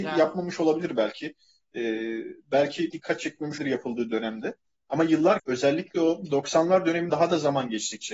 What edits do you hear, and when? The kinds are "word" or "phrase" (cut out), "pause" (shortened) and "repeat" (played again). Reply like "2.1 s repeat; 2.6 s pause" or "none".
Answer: 2.9 s word; 3.6 s word; 5.4 s word; 7.1 s word